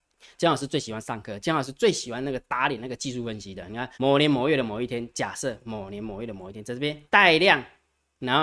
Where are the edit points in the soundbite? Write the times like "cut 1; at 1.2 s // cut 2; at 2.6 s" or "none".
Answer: cut 1; at 3.9 s // cut 2; at 7.1 s